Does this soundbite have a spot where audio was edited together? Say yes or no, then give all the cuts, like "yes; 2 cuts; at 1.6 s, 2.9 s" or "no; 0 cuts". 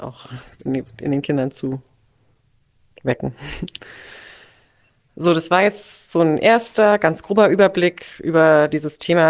no; 0 cuts